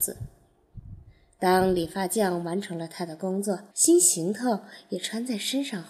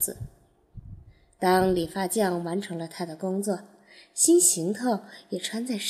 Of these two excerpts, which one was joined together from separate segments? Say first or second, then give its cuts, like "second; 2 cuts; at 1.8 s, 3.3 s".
first; 1 cut; at 3.7 s